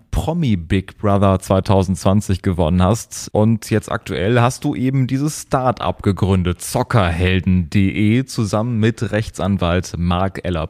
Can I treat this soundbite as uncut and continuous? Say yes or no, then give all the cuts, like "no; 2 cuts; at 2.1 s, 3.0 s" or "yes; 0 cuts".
yes; 0 cuts